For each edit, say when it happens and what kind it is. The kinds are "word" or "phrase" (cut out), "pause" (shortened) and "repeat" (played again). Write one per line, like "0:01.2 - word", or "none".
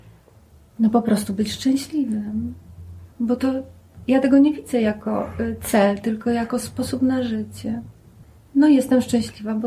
0:03.1 - pause
0:08.2 - pause